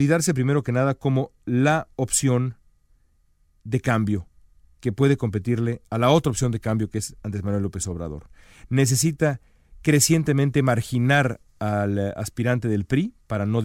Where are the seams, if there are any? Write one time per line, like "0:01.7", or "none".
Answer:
none